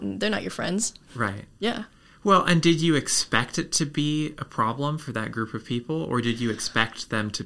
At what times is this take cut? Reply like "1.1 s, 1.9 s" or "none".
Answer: none